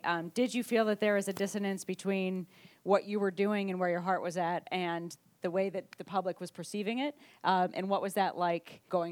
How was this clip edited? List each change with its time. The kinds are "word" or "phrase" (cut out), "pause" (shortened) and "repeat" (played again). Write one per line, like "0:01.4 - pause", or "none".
none